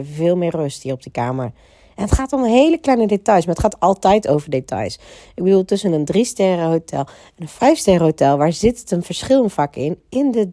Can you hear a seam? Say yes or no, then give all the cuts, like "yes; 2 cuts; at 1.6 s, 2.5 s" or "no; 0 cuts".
no; 0 cuts